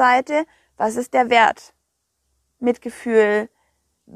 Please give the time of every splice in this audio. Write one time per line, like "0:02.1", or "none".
none